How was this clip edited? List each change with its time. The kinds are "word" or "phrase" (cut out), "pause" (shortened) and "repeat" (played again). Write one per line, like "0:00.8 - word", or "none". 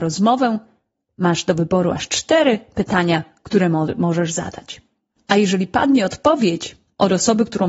none